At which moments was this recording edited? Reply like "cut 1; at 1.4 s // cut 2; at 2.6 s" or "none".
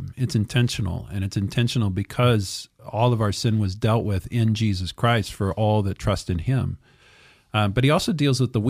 none